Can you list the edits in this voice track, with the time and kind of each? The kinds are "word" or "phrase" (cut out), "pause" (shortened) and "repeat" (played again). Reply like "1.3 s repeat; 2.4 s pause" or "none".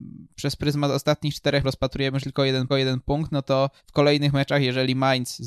1.6 s word; 2.2 s phrase; 2.7 s repeat; 3.8 s pause